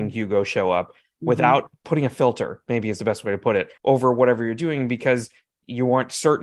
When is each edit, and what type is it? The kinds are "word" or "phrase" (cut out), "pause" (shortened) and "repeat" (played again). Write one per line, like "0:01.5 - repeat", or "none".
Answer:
0:03.8 - pause